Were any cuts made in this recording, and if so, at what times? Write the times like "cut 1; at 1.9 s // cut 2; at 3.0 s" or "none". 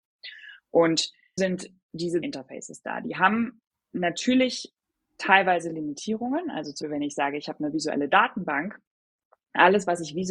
cut 1; at 1.4 s // cut 2; at 2.2 s // cut 3; at 6.8 s